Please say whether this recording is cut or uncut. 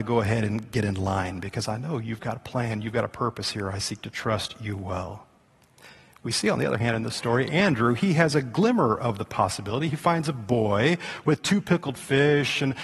uncut